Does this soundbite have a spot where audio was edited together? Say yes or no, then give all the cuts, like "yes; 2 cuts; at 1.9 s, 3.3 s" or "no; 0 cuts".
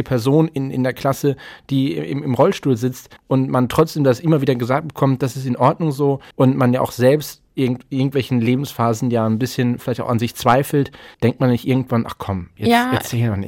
yes; 3 cuts; at 3.2 s, 6.3 s, 11.1 s